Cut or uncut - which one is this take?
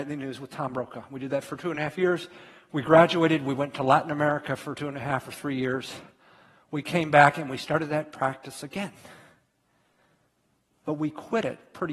uncut